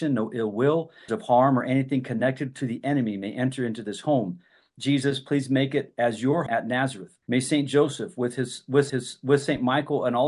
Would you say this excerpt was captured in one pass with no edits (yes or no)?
no